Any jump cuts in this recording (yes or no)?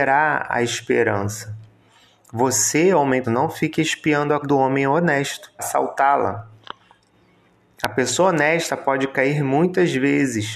yes